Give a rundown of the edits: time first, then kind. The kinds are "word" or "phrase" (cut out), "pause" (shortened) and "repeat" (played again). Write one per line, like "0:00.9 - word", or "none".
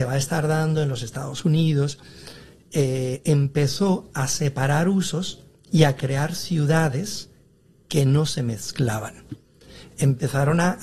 none